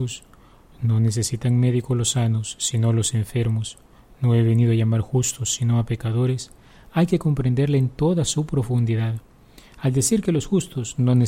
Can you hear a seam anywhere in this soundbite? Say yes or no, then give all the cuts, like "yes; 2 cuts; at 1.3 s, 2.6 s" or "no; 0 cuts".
no; 0 cuts